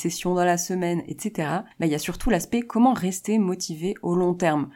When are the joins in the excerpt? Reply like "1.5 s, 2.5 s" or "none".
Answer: 1.7 s